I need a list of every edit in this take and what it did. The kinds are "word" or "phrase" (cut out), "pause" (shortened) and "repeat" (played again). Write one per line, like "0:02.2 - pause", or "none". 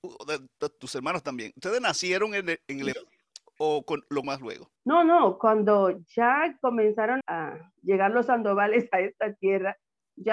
0:02.9 - word
0:04.2 - word
0:04.8 - pause
0:07.2 - word